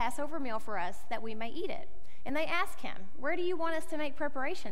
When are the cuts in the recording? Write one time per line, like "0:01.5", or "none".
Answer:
none